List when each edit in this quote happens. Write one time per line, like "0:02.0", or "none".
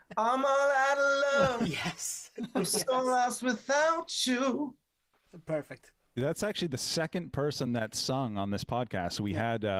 none

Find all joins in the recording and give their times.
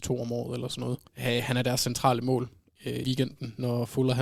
0:01.1
0:03.0

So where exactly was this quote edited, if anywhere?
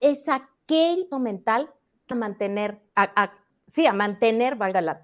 0:01.1
0:02.1
0:02.9

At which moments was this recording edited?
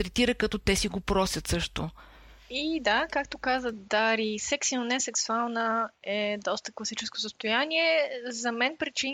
none

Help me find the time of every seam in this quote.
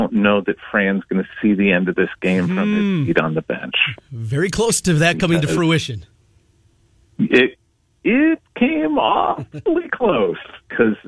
none

